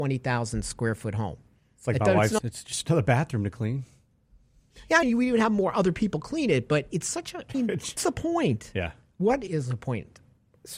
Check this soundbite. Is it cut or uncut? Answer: cut